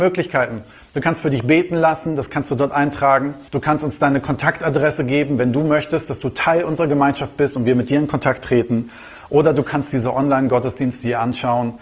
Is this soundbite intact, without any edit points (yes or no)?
no